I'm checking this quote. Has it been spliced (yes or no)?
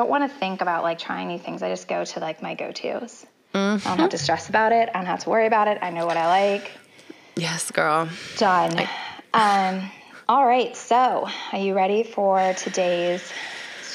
no